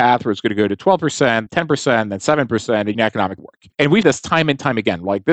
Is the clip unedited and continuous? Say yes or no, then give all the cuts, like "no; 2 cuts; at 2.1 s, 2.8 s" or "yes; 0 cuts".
no; 5 cuts; at 1.5 s, 2.9 s, 3.4 s, 3.7 s, 4.0 s